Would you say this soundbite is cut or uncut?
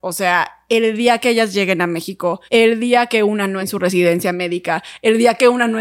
cut